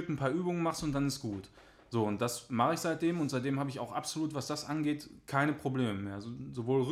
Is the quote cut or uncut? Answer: uncut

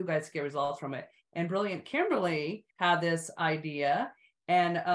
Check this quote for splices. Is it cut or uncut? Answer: cut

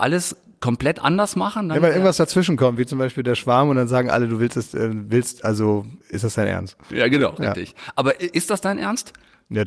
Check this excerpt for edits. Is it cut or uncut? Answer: uncut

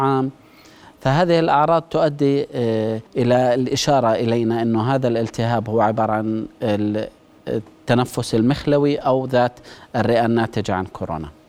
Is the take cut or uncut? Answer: cut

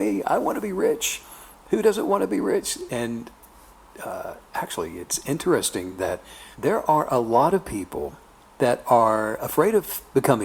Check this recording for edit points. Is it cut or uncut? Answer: cut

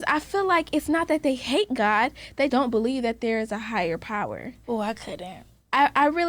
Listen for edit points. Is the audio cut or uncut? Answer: cut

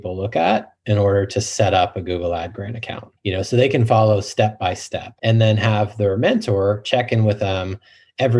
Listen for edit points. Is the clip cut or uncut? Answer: cut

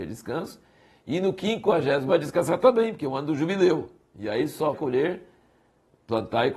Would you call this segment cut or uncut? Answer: cut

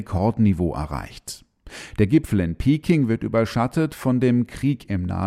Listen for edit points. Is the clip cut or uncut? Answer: uncut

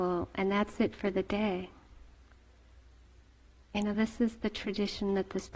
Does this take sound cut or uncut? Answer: uncut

